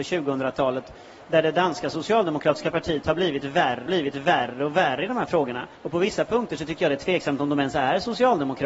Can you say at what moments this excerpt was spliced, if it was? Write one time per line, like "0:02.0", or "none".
0:03.9
0:05.8